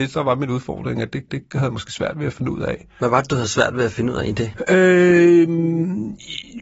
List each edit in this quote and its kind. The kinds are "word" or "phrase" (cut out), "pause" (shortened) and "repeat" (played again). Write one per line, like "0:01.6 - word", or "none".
0:01.3 - repeat